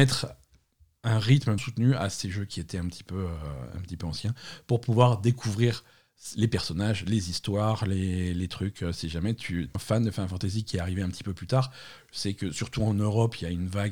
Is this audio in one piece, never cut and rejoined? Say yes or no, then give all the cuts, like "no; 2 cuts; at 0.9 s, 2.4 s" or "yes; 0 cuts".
no; 2 cuts; at 1.6 s, 9.7 s